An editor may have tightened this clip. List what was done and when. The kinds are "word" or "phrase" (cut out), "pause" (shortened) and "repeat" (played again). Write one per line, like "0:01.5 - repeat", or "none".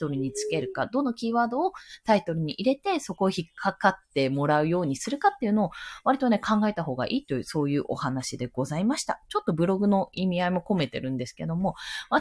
none

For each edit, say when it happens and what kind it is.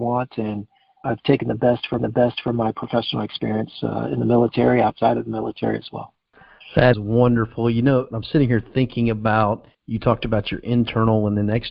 0:01.0 - word
0:02.0 - repeat
0:06.9 - word
0:08.1 - word
0:09.7 - pause

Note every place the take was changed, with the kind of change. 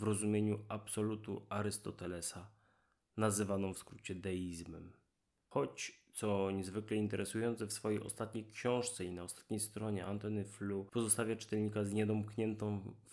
none

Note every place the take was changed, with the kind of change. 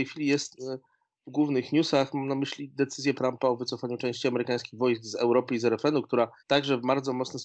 0:03.2 - word
0:06.4 - pause

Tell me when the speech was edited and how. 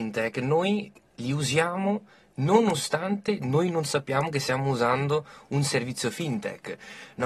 none

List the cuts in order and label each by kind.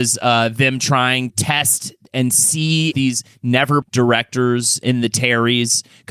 0:01.3 - word
0:02.9 - word
0:03.8 - word
0:04.8 - word

